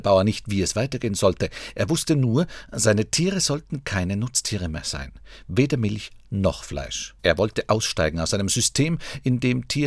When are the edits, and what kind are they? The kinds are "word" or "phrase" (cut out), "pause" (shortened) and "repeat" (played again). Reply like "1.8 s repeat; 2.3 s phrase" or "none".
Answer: 7.2 s pause